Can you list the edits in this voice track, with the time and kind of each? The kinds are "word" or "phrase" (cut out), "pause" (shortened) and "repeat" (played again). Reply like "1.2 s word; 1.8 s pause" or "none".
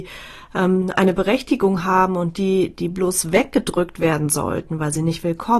none